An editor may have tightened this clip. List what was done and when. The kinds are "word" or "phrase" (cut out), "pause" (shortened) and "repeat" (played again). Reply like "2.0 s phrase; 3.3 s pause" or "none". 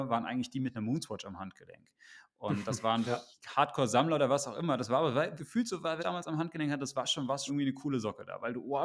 3.0 s word; 5.4 s word; 6.0 s phrase; 7.5 s word